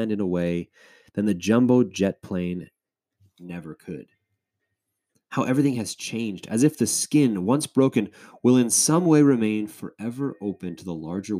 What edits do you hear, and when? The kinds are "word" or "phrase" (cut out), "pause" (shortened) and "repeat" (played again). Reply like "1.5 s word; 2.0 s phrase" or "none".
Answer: none